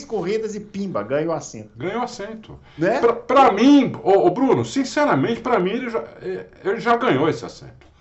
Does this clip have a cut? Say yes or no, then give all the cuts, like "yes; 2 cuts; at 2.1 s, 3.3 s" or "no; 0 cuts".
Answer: no; 0 cuts